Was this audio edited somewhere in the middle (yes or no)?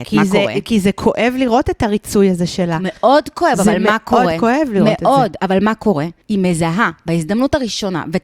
yes